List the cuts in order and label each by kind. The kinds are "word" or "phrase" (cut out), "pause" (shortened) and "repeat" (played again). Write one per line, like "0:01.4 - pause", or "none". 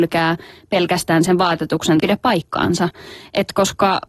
0:02.0 - phrase